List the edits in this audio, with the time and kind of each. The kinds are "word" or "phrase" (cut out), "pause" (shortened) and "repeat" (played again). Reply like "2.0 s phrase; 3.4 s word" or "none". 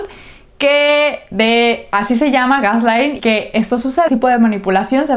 3.2 s word; 4.1 s word